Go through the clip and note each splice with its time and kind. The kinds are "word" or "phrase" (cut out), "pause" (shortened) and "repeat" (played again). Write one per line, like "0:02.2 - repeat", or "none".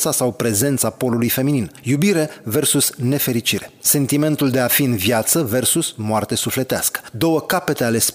none